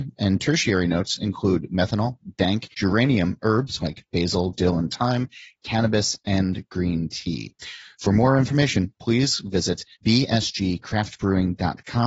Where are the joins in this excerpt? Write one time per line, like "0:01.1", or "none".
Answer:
0:02.7
0:09.9